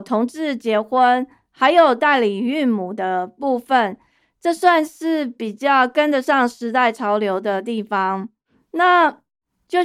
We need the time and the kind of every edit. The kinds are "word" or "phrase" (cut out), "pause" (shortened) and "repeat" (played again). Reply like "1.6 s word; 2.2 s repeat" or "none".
none